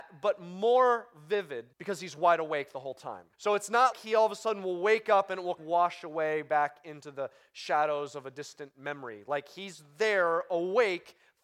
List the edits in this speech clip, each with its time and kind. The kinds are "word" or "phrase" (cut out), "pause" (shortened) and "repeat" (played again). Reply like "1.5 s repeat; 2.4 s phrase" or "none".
1.7 s pause; 3.3 s pause; 3.9 s word; 5.6 s phrase